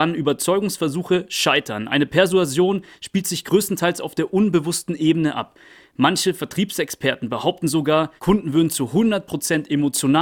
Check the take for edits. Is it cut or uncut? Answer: cut